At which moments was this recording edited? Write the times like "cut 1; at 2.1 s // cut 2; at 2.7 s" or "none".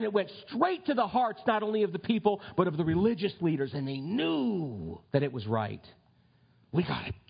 cut 1; at 5.1 s